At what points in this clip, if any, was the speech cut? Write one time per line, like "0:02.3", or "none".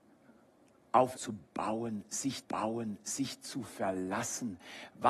0:01.1
0:02.4